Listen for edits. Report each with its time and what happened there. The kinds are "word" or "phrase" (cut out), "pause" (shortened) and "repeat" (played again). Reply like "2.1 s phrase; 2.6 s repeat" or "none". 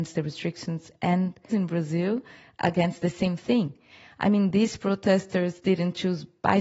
1.5 s word